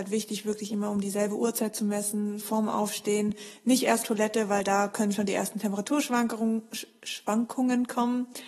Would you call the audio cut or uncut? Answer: cut